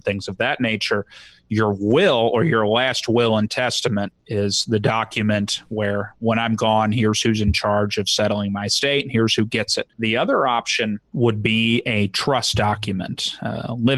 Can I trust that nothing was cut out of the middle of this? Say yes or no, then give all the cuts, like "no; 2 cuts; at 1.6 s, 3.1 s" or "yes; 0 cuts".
no; 3 cuts; at 4.2 s, 9.9 s, 11.1 s